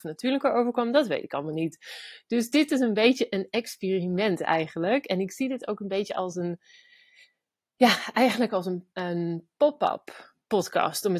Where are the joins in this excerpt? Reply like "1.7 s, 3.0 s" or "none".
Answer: 8.9 s

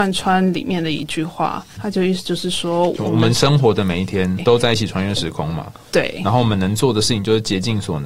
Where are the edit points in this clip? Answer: 1.8 s, 4.4 s

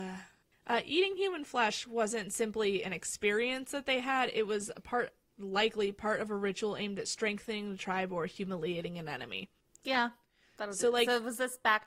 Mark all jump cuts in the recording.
none

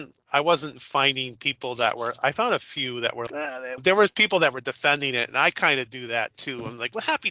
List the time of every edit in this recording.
3.3 s, 3.8 s

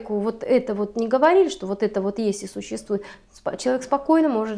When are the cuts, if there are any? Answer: none

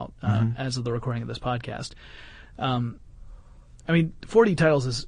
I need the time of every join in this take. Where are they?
none

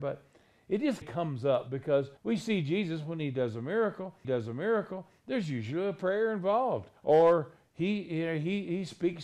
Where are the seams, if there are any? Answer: 1.0 s, 2.2 s, 4.2 s, 7.0 s

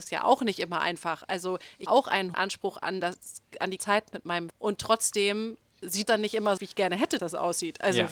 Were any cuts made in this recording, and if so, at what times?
1.9 s, 2.3 s, 3.8 s, 4.5 s, 6.1 s, 6.6 s, 7.2 s

